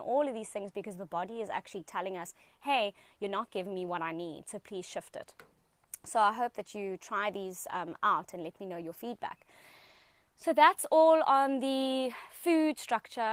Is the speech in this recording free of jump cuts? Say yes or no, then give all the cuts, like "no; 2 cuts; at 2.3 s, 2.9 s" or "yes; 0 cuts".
yes; 0 cuts